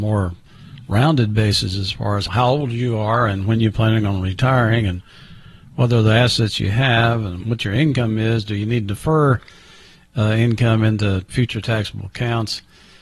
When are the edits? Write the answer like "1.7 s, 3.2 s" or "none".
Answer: none